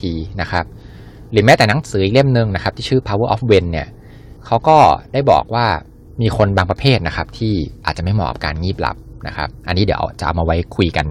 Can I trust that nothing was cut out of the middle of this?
no; 2 cuts; at 4.4 s, 6.1 s

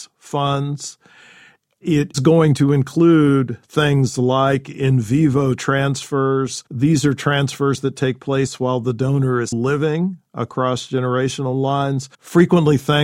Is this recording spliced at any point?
yes; 4 cuts; at 2.1 s, 6.7 s, 9.5 s, 12.1 s

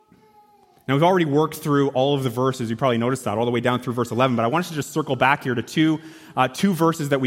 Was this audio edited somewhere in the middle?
no; 0 cuts

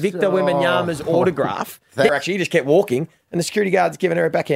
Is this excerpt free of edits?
no; 1 cut; at 2.1 s

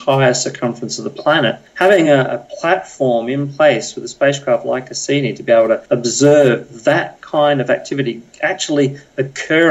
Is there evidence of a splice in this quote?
no; 0 cuts

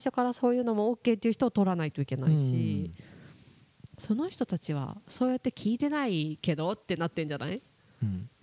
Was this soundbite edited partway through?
no; 0 cuts

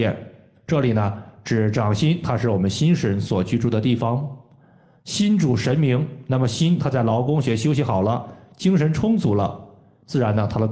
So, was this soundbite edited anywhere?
no; 0 cuts

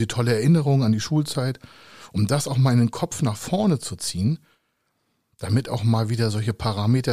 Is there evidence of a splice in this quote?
no; 0 cuts

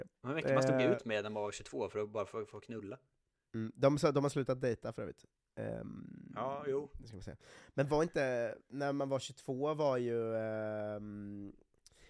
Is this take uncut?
yes; 0 cuts

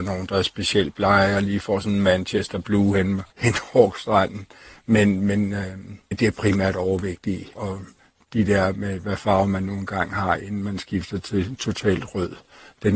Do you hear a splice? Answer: yes; 4 cuts; at 3.3 s, 6.1 s, 7.5 s, 8.0 s

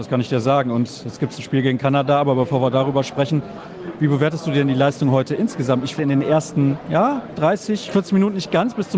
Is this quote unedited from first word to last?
no; 1 cut; at 6.0 s

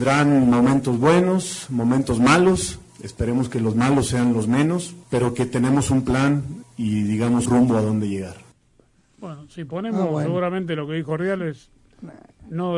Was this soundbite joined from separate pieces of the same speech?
yes; 2 cuts; at 5.0 s, 7.4 s

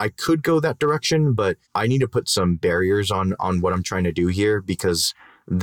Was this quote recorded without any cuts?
no; 1 cut; at 1.6 s

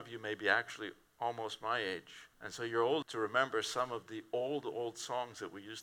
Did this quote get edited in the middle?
yes; 3 cuts; at 1.1 s, 2.3 s, 3.0 s

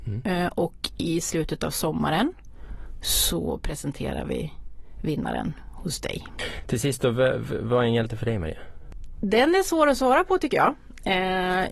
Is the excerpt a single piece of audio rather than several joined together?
yes; 0 cuts

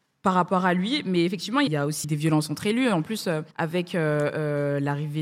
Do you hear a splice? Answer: yes; 3 cuts; at 1.7 s, 2.0 s, 3.5 s

